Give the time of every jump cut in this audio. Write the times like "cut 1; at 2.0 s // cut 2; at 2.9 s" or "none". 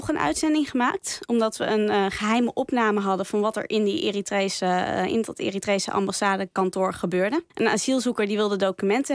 cut 1; at 7.5 s